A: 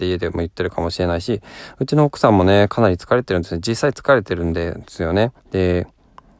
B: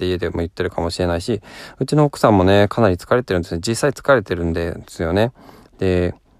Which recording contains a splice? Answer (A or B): A